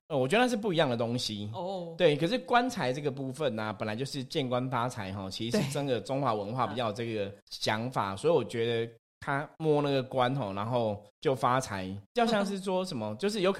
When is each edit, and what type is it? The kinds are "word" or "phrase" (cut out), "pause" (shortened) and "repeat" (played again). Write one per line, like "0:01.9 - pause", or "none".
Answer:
0:07.4 - pause
0:11.1 - pause
0:12.0 - pause